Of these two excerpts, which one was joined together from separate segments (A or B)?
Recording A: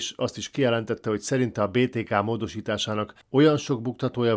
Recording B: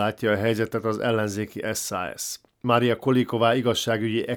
A